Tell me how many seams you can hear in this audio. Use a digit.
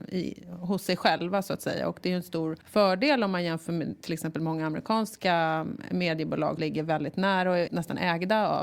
2